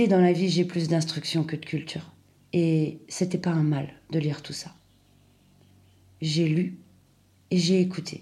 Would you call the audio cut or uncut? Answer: uncut